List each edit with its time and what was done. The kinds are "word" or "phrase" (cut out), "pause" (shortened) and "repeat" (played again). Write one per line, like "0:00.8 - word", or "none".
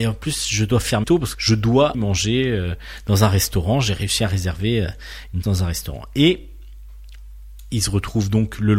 0:01.0 - word
0:01.3 - word
0:01.9 - word
0:05.4 - word

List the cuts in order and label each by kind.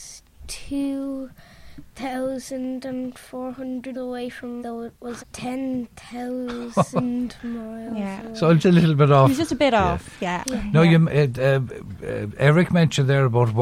0:03.9 - word
0:04.6 - word
0:05.2 - word
0:08.6 - word

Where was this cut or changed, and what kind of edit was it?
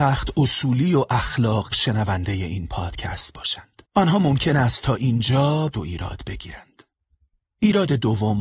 0:01.7 - word
0:03.8 - pause
0:05.7 - phrase

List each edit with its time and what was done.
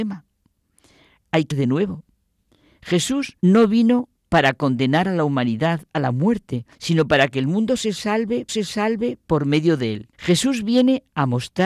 0:01.5 - word
0:03.4 - pause
0:04.2 - pause
0:06.7 - pause
0:08.5 - repeat
0:10.1 - pause

